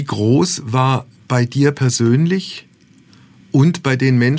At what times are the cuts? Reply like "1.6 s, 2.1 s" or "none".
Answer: none